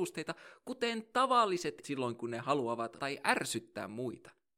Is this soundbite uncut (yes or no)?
no